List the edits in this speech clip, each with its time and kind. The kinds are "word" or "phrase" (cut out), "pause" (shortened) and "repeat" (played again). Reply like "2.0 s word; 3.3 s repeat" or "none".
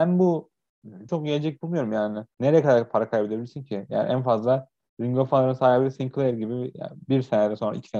1.1 s phrase; 2.3 s pause